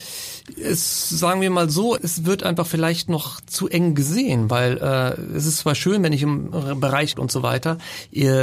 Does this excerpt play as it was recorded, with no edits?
no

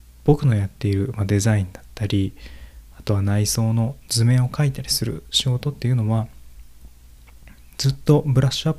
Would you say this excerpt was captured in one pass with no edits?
yes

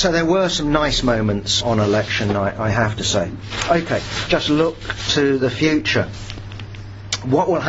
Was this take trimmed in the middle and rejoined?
yes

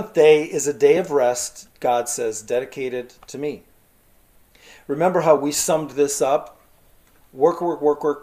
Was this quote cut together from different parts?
no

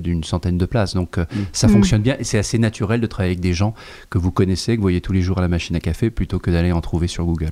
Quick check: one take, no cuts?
yes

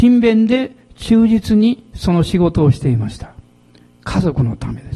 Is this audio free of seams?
yes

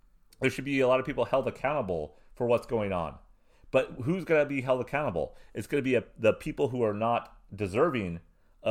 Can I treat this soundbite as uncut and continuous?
yes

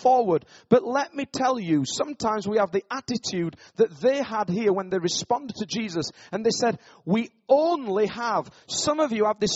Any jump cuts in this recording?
no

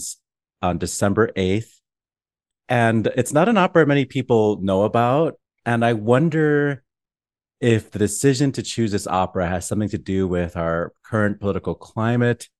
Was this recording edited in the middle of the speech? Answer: no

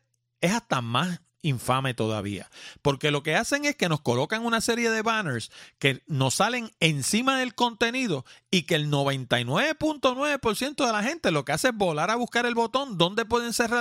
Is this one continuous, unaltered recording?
yes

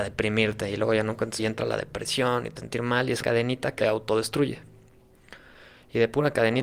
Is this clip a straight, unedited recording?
no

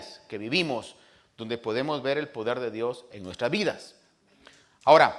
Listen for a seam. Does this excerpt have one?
no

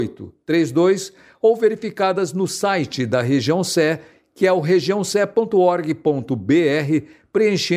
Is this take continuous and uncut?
yes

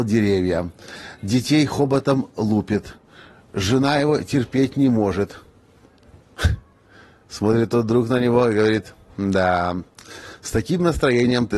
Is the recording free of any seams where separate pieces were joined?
yes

